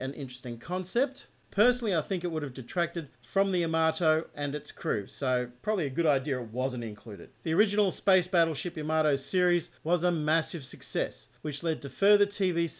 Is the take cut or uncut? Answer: cut